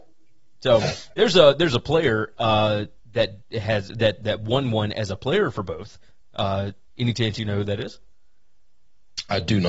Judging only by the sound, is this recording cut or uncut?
uncut